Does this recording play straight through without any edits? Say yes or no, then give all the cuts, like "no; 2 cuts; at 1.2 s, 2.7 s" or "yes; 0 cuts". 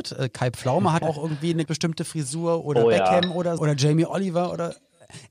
no; 3 cuts; at 1.0 s, 1.7 s, 3.6 s